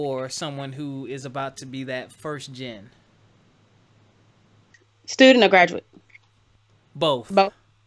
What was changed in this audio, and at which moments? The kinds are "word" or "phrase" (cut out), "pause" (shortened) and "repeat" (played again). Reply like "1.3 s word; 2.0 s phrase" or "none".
none